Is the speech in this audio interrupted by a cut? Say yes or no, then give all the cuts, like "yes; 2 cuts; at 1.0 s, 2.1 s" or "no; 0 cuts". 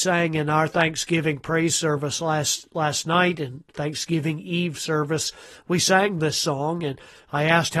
no; 0 cuts